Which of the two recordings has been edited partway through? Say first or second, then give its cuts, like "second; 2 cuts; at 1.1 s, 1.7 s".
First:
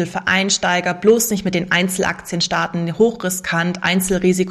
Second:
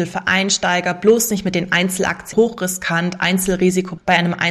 second; 1 cut; at 2.3 s